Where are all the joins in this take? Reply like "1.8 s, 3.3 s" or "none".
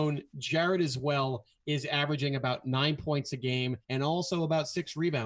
3.8 s